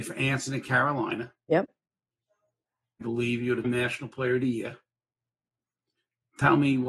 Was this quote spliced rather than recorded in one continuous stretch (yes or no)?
yes